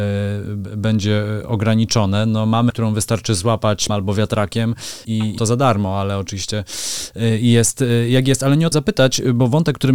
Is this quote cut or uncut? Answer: cut